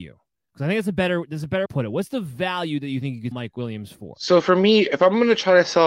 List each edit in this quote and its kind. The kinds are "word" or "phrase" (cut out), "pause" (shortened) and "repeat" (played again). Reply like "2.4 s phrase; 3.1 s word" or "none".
1.7 s phrase; 3.3 s word